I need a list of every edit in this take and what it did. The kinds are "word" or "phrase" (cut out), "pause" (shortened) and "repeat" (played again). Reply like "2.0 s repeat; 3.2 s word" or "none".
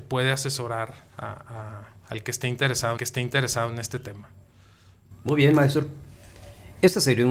3.0 s repeat